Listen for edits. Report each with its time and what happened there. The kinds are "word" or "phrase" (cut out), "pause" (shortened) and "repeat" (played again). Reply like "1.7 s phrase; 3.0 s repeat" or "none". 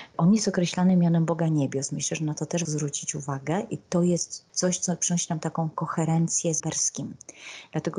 2.6 s word; 6.6 s word